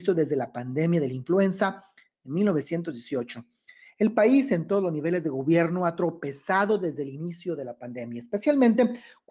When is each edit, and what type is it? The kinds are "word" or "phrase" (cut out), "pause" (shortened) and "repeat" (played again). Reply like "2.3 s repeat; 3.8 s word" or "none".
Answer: none